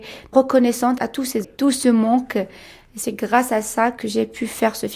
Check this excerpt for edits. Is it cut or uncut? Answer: cut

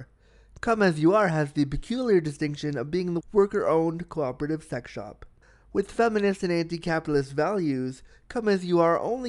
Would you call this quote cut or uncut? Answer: cut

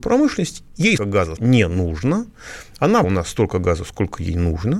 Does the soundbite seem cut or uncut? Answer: cut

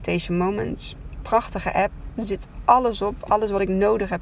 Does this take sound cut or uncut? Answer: uncut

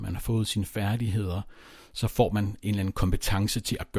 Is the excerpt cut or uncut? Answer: uncut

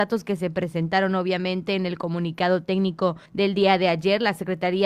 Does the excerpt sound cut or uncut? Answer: cut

